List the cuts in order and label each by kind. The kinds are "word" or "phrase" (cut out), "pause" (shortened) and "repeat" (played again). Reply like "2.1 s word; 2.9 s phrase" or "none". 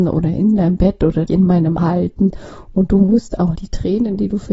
1.3 s word; 1.8 s word; 3.6 s word